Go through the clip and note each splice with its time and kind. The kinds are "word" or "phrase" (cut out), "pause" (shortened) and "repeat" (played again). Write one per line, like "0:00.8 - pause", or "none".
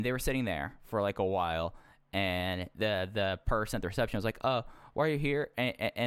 none